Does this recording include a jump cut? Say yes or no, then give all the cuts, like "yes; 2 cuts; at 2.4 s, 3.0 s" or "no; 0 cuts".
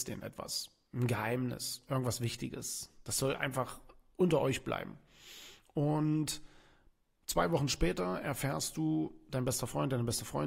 no; 0 cuts